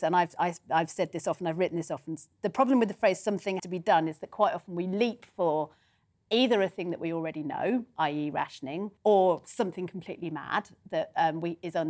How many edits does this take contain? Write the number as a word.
two